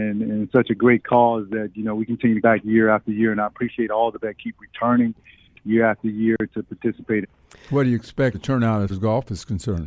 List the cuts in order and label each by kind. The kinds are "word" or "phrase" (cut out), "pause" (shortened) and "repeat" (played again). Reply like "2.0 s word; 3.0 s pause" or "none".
2.4 s word; 4.2 s word; 7.2 s word; 8.3 s word; 8.9 s word